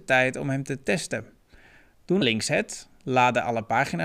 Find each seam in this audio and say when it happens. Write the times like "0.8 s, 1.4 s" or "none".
2.2 s, 3.0 s